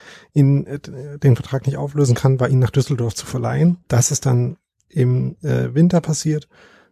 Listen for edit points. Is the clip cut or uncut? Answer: uncut